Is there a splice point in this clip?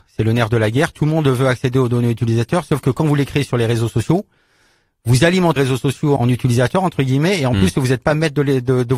yes; 2 cuts; at 5.6 s, 6.2 s

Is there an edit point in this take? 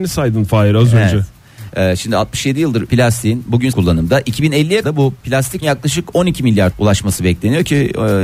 yes; 5 cuts; at 2.9 s, 3.7 s, 4.8 s, 5.6 s, 6.7 s

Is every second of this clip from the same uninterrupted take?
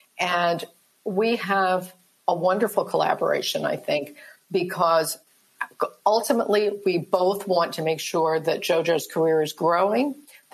yes; 0 cuts

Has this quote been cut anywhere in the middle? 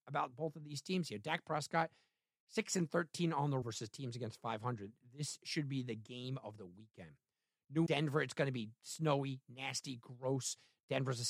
yes; 2 cuts; at 3.6 s, 7.9 s

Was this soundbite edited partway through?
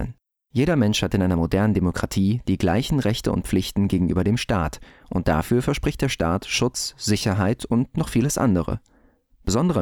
no; 0 cuts

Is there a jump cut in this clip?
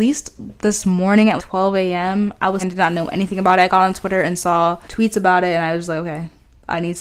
yes; 3 cuts; at 1.4 s, 2.6 s, 4.8 s

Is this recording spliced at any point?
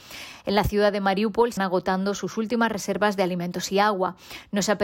yes; 1 cut; at 1.6 s

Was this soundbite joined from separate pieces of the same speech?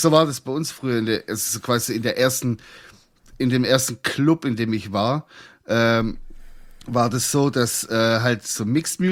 no; 0 cuts

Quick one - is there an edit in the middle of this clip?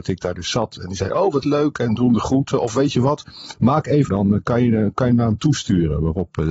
yes; 1 cut; at 4.1 s

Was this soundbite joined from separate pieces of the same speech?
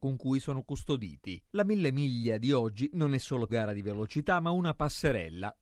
yes; 1 cut; at 3.5 s

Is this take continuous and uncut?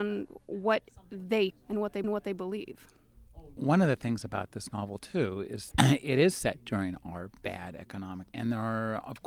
no; 5 cuts; at 1.5 s, 2.0 s, 5.7 s, 7.4 s, 8.3 s

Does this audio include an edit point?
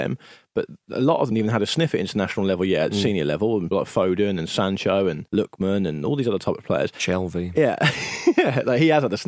yes; 3 cuts; at 1.3 s, 3.7 s, 5.3 s

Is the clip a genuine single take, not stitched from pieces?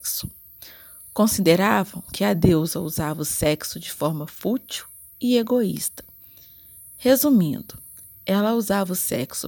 yes; 0 cuts

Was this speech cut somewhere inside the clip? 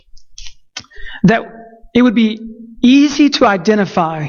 no; 0 cuts

